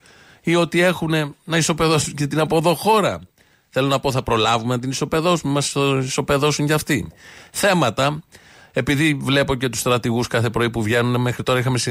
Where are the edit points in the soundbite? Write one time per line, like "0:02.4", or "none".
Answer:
none